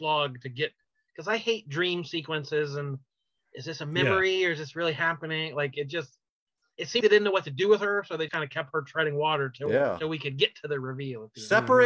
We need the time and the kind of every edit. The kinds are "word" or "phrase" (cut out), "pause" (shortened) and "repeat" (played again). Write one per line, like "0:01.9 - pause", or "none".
0:07.0 - word
0:08.3 - word

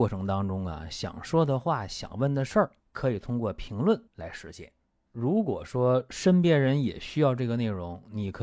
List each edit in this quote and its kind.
0:02.8 - pause
0:04.1 - pause

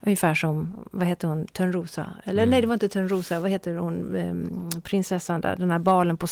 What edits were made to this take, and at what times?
none

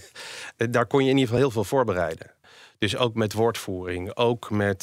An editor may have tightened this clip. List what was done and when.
none

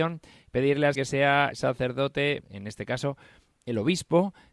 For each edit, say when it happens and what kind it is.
0:00.9 - word
0:01.5 - word
0:02.4 - word

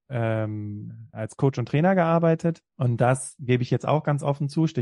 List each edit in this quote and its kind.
0:02.7 - pause

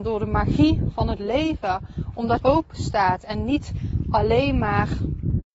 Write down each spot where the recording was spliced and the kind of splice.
0:02.4 - phrase

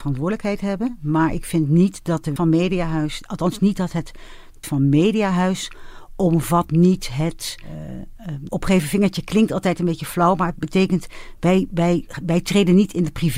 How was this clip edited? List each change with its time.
0:02.4 - word
0:04.6 - word
0:08.5 - word

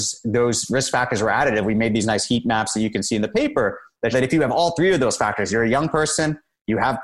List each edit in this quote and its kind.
0:04.1 - word

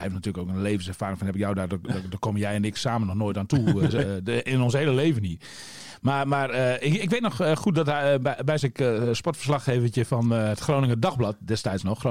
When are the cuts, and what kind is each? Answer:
0:08.6 - phrase

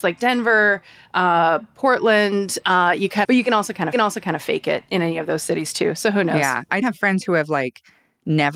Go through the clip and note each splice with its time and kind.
0:03.2 - phrase
0:03.9 - repeat
0:06.8 - word

